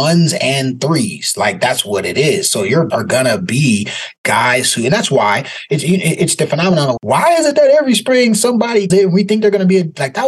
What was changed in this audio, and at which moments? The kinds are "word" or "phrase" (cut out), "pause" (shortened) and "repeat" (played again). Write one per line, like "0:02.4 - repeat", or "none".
0:02.9 - word
0:07.0 - word
0:08.9 - word